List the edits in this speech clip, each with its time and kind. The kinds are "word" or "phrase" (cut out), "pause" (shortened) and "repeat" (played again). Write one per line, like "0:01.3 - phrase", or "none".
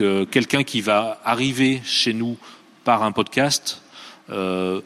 none